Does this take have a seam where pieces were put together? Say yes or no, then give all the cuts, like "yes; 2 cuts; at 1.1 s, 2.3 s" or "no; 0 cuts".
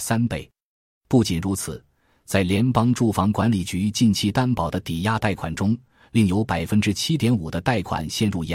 no; 0 cuts